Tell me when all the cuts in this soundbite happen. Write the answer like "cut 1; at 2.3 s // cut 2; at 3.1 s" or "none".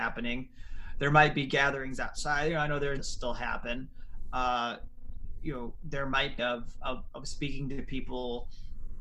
cut 1; at 3.0 s // cut 2; at 6.4 s